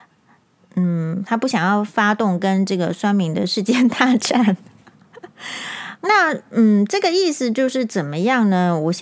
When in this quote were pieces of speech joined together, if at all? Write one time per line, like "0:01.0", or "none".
0:06.0